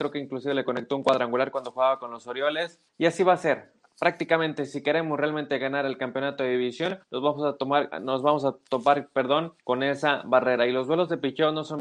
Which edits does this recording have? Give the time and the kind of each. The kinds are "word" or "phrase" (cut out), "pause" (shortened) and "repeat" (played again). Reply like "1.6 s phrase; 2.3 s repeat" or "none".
2.9 s pause; 7.0 s pause; 9.6 s pause